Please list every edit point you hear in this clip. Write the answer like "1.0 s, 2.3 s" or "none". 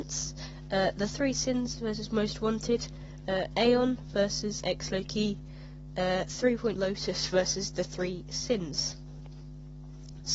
4.6 s, 6.8 s